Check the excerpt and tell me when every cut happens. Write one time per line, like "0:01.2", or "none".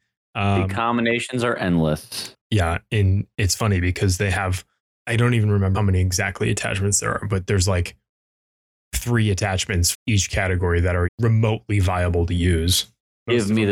0:04.8
0:05.7
0:09.9
0:11.0